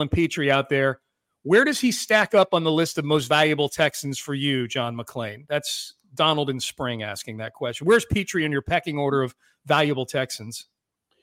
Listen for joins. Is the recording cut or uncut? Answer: uncut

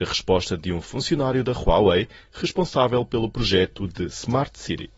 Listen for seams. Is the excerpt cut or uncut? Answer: uncut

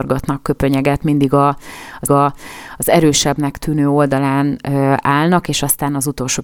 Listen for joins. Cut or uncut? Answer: cut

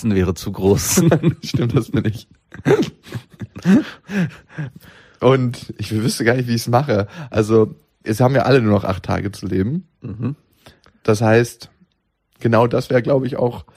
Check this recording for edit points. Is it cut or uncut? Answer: uncut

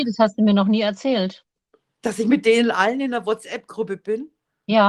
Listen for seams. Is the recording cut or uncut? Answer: uncut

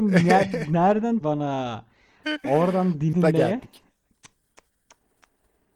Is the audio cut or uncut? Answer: cut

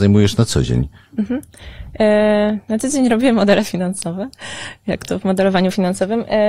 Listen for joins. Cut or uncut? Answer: uncut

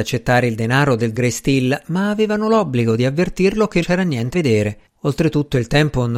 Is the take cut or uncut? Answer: cut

